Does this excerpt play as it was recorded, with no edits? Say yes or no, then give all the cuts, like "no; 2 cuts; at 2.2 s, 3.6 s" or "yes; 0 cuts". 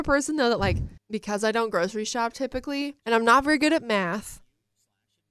no; 2 cuts; at 1.0 s, 3.0 s